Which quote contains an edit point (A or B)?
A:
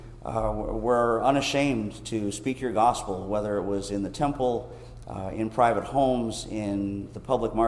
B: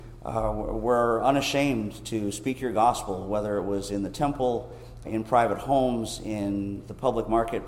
B